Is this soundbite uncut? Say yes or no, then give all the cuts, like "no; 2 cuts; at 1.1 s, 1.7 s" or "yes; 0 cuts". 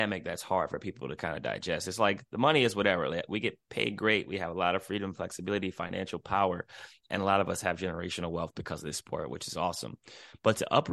yes; 0 cuts